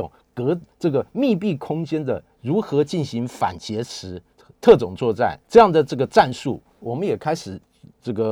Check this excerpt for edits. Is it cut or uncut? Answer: cut